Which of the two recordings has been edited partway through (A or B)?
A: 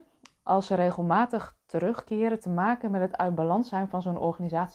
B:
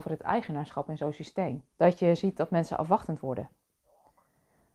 B